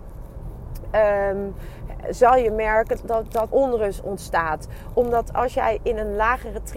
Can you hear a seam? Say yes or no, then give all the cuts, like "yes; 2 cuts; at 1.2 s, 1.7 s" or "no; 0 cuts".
yes; 2 cuts; at 3.0 s, 3.5 s